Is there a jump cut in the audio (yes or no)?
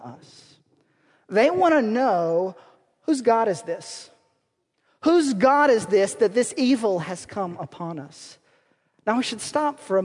no